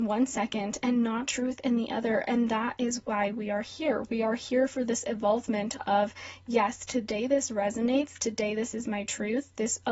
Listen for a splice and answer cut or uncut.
uncut